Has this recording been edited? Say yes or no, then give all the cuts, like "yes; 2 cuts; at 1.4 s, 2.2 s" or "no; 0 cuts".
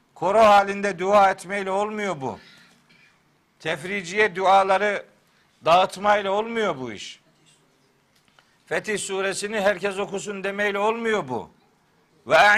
no; 0 cuts